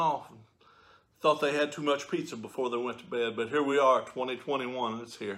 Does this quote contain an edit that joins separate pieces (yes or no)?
no